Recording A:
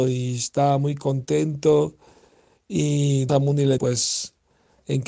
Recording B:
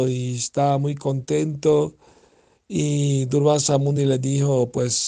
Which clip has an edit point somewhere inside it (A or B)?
A